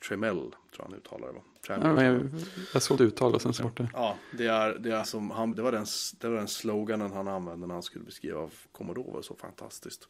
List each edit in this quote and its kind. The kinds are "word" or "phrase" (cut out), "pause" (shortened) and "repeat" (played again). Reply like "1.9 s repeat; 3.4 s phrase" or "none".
2.0 s word; 3.0 s word; 3.6 s word; 5.0 s word; 5.5 s word; 8.6 s word